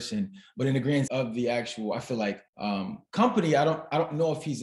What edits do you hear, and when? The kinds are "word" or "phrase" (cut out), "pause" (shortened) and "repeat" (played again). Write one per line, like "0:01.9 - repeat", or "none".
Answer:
0:01.1 - phrase
0:02.5 - pause